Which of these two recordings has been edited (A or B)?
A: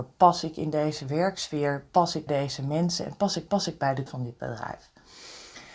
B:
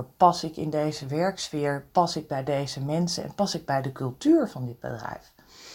A